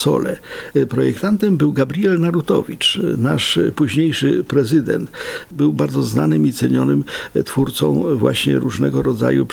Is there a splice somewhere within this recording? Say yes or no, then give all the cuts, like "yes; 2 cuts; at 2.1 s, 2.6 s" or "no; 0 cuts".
no; 0 cuts